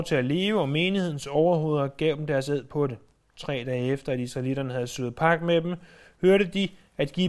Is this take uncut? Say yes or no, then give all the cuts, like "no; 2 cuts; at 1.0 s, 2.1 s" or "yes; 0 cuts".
yes; 0 cuts